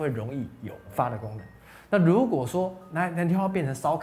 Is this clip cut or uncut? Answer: uncut